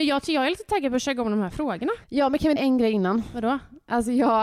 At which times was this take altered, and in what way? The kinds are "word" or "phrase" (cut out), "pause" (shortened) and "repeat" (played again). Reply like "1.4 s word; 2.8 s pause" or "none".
2.0 s pause; 2.6 s word